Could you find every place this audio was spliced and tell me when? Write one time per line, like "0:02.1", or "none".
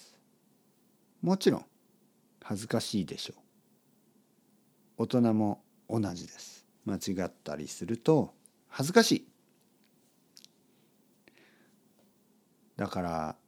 0:06.7